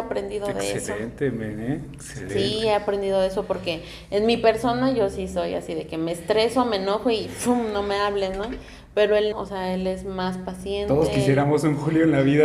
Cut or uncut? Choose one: cut